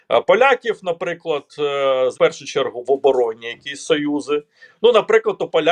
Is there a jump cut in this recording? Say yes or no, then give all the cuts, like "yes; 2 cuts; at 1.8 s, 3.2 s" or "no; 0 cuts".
yes; 1 cut; at 2.1 s